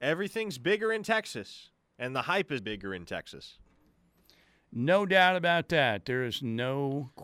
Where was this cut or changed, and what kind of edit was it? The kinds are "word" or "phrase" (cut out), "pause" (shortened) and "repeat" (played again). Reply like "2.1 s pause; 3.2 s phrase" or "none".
2.6 s word